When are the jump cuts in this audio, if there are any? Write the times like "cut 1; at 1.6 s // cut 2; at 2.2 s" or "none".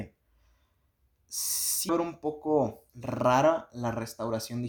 cut 1; at 1.9 s // cut 2; at 2.9 s